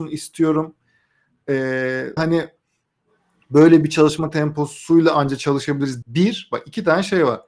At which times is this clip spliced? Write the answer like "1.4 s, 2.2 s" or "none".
2.2 s, 6.0 s